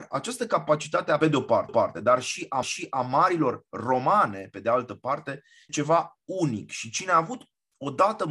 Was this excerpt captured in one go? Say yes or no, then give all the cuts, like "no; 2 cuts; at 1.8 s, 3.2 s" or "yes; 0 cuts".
no; 4 cuts; at 1.2 s, 1.7 s, 2.6 s, 5.7 s